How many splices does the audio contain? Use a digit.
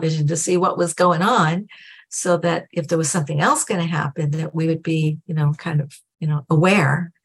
0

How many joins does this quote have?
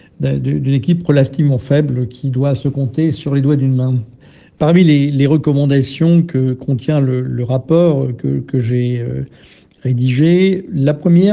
0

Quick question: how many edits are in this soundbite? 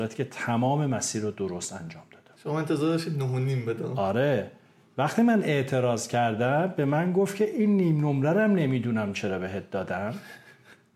0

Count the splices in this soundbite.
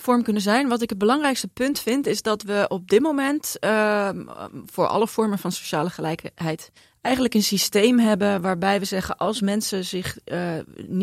1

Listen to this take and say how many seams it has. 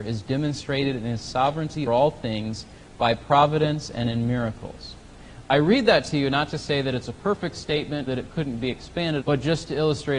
3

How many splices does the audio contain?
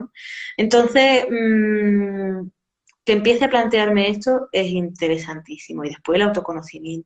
0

